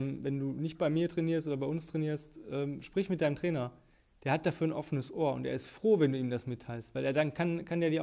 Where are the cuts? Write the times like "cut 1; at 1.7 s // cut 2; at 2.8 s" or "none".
none